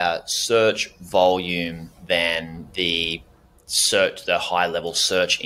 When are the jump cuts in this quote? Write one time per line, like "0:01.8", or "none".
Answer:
none